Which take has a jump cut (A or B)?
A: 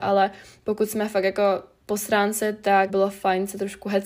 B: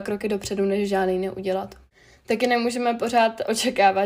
A